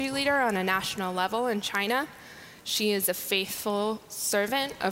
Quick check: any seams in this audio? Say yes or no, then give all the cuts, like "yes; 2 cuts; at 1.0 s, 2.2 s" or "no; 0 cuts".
no; 0 cuts